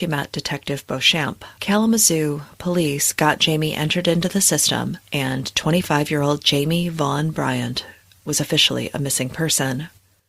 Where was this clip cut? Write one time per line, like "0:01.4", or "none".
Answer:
0:01.5